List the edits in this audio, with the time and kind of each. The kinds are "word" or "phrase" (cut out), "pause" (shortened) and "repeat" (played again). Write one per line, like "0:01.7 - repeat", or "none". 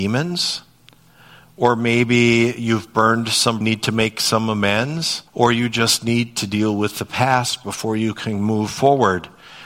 0:03.6 - phrase
0:05.3 - pause